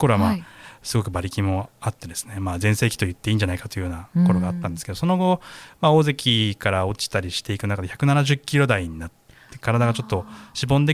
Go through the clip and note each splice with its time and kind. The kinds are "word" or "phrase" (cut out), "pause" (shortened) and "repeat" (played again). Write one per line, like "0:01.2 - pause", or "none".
none